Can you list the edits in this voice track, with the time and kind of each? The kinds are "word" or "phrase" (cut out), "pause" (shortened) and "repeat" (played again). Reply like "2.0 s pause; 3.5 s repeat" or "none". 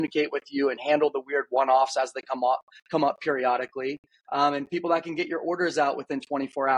none